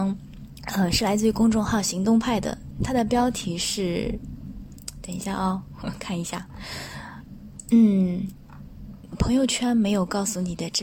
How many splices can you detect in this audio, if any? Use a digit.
0